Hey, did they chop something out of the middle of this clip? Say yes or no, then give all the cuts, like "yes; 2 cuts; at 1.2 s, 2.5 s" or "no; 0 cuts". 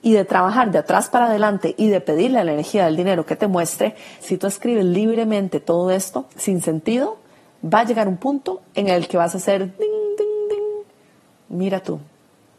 yes; 3 cuts; at 4.2 s, 6.3 s, 9.8 s